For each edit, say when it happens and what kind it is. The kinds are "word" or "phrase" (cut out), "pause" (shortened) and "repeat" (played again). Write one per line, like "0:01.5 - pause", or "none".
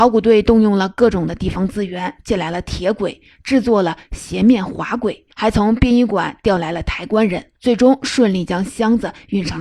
0:05.3 - pause
0:07.6 - pause